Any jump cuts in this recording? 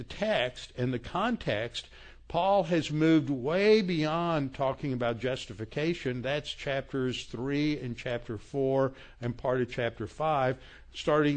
no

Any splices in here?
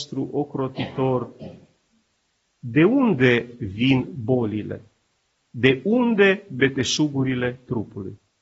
no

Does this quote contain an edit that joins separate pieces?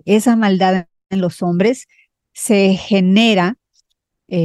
no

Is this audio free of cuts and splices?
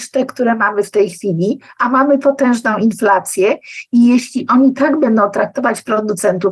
yes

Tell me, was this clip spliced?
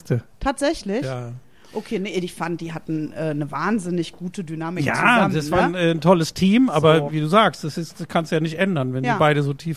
no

